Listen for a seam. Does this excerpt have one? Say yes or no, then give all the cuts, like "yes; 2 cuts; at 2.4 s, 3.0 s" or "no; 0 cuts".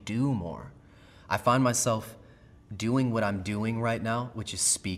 no; 0 cuts